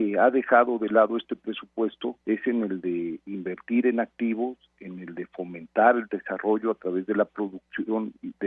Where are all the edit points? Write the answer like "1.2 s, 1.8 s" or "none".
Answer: 2.2 s